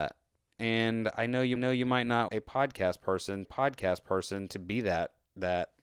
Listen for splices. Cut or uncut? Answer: cut